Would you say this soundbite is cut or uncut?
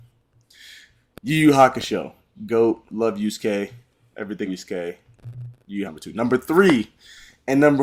cut